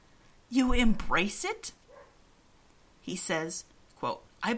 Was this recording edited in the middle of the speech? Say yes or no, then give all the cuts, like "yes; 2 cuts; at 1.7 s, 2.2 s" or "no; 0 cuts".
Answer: no; 0 cuts